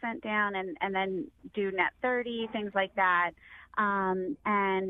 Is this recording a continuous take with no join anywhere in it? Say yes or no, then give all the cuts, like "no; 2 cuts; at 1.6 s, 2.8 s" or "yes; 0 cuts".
yes; 0 cuts